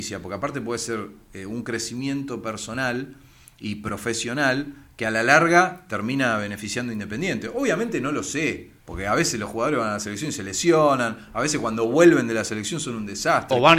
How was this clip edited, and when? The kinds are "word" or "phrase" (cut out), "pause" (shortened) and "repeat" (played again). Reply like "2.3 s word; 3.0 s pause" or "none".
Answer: 8.8 s pause